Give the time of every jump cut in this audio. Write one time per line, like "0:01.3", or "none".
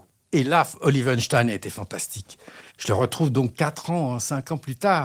0:02.7